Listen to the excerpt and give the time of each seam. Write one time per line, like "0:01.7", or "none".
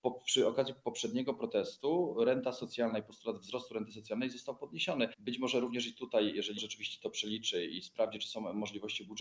0:05.1
0:06.6